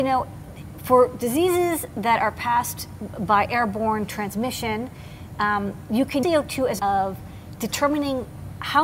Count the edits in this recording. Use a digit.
2